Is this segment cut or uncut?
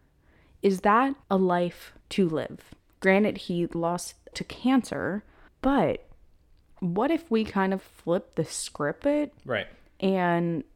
cut